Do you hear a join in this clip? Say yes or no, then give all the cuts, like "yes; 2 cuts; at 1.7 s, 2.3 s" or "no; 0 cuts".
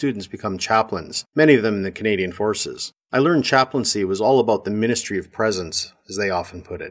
yes; 2 cuts; at 1.3 s, 3.0 s